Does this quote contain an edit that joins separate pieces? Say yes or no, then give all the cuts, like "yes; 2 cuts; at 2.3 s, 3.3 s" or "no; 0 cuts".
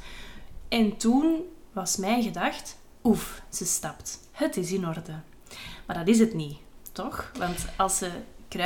no; 0 cuts